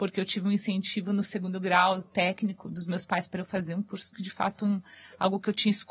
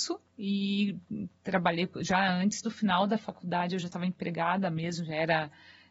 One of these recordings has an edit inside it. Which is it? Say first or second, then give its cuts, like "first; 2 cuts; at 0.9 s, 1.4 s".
first; 1 cut; at 4.1 s